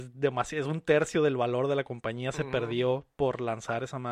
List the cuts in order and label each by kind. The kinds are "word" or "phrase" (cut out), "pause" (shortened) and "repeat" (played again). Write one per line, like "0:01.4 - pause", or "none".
none